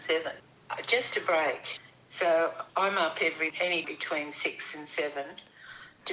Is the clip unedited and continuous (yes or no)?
no